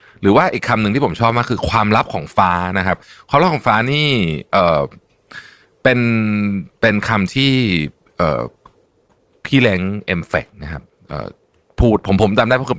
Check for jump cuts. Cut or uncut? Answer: uncut